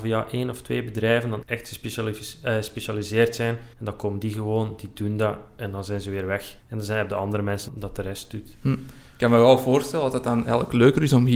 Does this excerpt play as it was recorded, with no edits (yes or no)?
no